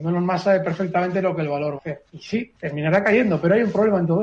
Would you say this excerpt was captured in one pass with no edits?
no; 3 cuts; at 1.8 s, 2.1 s, 2.6 s

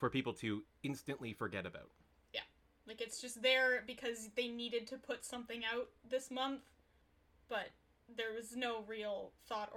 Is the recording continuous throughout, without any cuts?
yes; 0 cuts

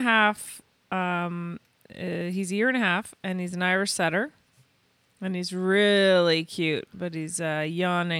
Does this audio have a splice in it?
no; 0 cuts

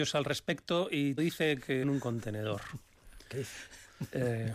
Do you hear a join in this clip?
yes; 3 cuts; at 1.2 s, 1.8 s, 3.3 s

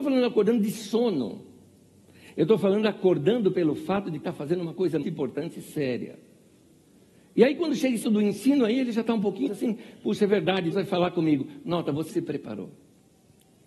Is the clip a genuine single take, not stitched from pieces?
no; 6 cuts; at 4.2 s, 5.0 s, 8.0 s, 9.5 s, 10.7 s, 12.1 s

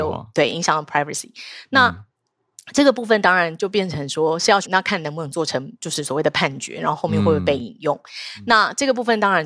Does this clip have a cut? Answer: yes; 2 cuts; at 4.6 s, 5.8 s

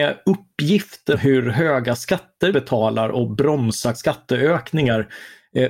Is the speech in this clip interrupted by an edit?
yes; 3 cuts; at 1.1 s, 2.5 s, 3.9 s

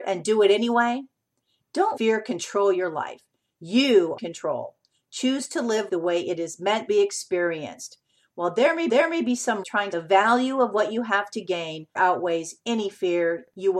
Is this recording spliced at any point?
yes; 8 cuts; at 2.0 s, 4.2 s, 5.9 s, 6.9 s, 8.9 s, 9.6 s, 9.9 s, 12.0 s

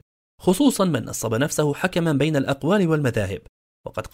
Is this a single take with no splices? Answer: yes; 0 cuts

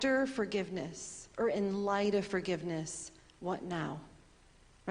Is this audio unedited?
yes; 0 cuts

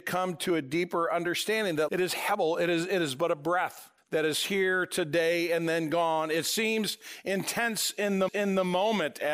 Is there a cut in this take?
yes; 3 cuts; at 1.9 s, 4.0 s, 8.3 s

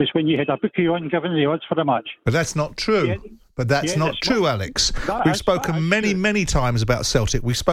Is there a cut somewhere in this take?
no; 0 cuts

